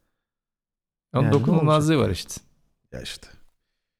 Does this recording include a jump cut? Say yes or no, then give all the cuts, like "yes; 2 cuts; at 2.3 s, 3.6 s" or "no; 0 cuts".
no; 0 cuts